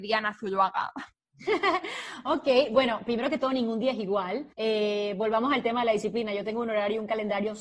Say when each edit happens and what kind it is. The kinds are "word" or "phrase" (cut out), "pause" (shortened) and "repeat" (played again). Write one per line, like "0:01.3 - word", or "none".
0:04.5 - pause